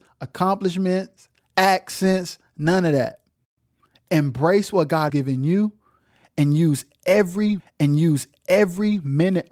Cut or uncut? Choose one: cut